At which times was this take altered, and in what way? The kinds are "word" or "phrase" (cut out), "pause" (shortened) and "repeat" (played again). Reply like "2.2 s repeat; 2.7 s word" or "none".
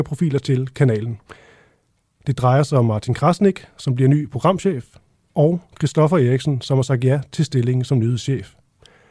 none